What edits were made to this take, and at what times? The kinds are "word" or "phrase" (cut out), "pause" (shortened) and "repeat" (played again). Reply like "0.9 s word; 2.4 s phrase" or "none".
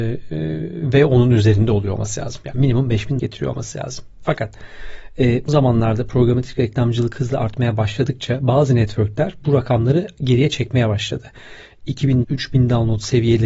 3.2 s word; 5.5 s word; 12.2 s word